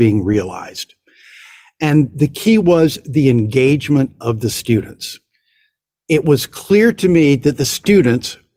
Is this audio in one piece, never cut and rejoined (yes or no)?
yes